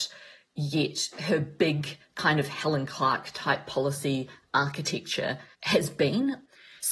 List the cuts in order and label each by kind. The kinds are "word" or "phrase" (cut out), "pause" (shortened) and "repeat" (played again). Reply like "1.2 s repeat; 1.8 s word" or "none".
5.5 s pause